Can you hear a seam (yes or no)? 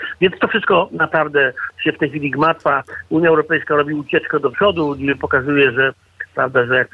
no